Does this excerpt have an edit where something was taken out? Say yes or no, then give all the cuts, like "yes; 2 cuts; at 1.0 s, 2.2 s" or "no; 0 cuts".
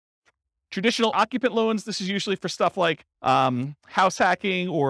yes; 2 cuts; at 1.1 s, 3.1 s